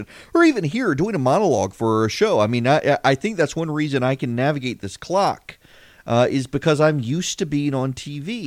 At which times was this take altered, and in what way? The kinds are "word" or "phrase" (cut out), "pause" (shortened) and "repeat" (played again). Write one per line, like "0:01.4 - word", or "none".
none